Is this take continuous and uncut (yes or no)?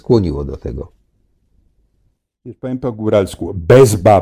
yes